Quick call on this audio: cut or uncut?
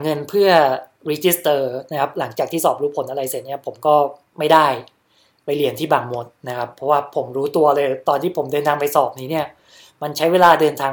uncut